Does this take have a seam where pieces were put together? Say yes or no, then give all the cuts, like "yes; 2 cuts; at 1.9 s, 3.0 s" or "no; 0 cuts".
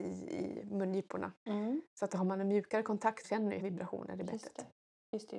yes; 2 cuts; at 3.2 s, 3.6 s